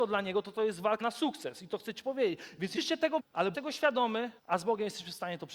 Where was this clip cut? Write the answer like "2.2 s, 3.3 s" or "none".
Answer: 1.0 s, 2.8 s, 3.2 s, 3.5 s, 4.4 s